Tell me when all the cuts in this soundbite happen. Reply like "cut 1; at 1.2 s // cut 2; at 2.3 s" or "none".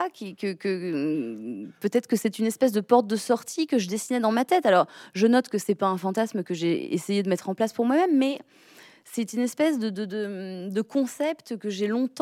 none